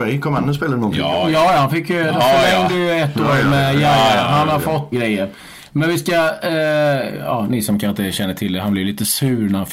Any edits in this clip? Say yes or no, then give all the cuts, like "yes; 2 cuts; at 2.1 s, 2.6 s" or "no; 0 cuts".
yes; 1 cut; at 4.9 s